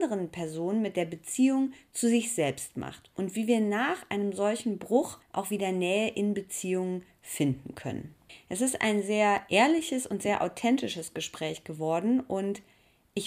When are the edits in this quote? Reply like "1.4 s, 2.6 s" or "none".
5.2 s, 8.3 s